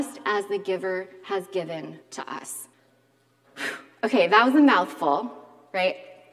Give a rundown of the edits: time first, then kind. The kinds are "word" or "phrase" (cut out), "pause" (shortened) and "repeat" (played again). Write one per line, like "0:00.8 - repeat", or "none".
0:02.0 - pause
0:02.7 - pause